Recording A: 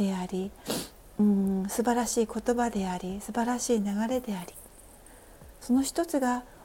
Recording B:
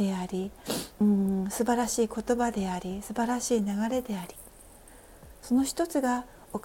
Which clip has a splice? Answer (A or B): B